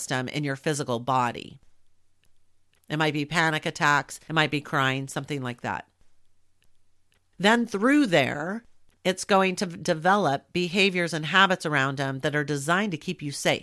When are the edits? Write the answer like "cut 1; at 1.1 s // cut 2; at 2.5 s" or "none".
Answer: none

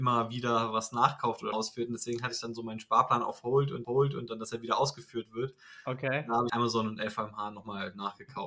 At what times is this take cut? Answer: cut 1; at 1.5 s // cut 2; at 3.8 s // cut 3; at 6.5 s

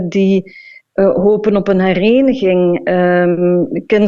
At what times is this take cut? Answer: none

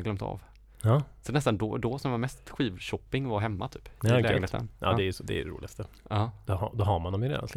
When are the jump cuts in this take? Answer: none

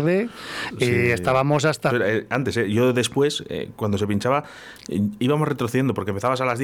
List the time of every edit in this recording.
cut 1; at 1.9 s

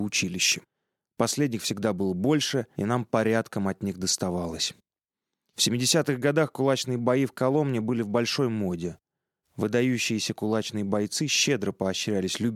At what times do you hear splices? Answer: none

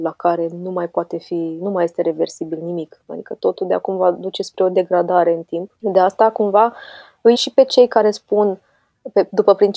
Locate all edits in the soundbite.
cut 1; at 7.3 s

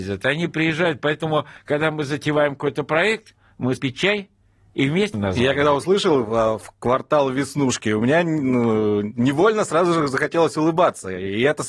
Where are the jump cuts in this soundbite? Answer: cut 1; at 3.8 s // cut 2; at 5.1 s

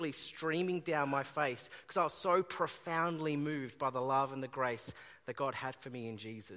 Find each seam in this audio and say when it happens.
none

